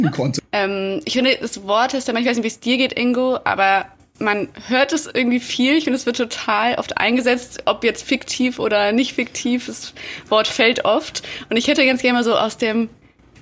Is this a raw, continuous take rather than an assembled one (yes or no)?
yes